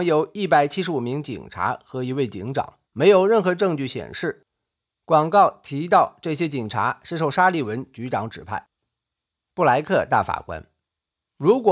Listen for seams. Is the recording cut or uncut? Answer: cut